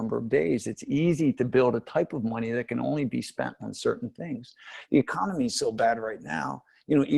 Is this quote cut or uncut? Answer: uncut